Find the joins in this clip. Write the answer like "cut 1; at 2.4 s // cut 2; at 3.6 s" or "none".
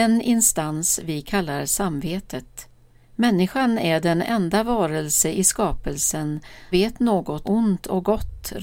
cut 1; at 3.0 s // cut 2; at 6.7 s // cut 3; at 7.4 s